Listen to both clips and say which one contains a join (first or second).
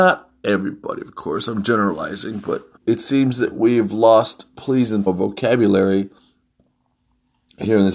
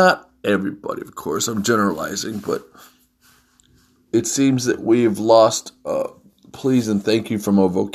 first